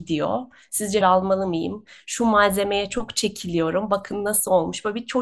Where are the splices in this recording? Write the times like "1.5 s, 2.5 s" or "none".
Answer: 1.0 s